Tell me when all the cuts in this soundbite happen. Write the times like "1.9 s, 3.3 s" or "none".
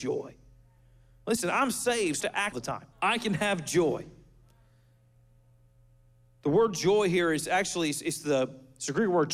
2.2 s, 2.5 s, 2.9 s

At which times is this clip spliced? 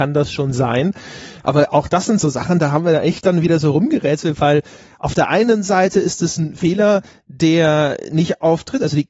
none

